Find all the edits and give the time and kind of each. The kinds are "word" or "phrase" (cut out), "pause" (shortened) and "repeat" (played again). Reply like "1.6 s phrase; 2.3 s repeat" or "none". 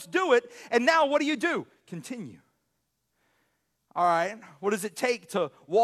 none